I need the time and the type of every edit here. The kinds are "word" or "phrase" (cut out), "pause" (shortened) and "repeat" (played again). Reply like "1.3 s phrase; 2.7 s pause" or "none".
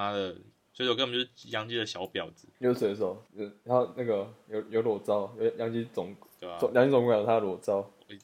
3.3 s pause